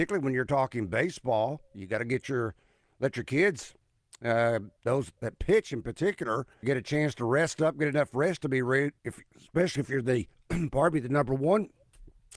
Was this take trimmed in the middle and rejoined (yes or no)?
yes